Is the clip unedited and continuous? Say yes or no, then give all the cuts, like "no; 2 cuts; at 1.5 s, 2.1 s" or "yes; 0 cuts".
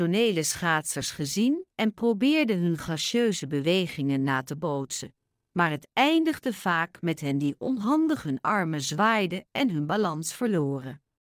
yes; 0 cuts